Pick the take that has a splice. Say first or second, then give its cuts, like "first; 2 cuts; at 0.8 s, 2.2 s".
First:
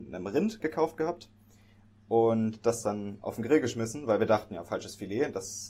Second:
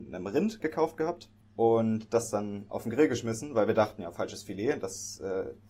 second; 1 cut; at 1.4 s